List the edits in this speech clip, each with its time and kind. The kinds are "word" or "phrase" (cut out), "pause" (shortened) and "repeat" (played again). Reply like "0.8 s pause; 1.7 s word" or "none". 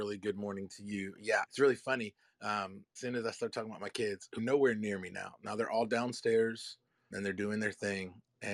1.4 s word; 3.0 s word; 4.4 s word; 7.1 s word